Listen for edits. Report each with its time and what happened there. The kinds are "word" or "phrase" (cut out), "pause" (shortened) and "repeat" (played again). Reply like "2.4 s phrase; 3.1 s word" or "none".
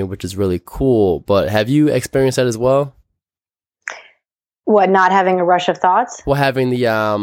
none